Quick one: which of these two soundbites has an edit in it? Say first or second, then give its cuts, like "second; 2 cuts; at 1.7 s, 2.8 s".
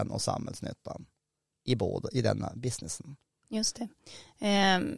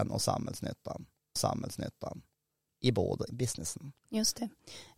second; 3 cuts; at 1.4 s, 3.3 s, 4.0 s